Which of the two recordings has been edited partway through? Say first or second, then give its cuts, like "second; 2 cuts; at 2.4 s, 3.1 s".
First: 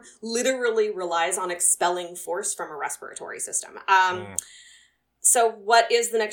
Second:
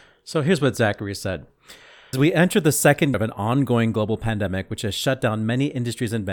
second; 2 cuts; at 2.1 s, 3.1 s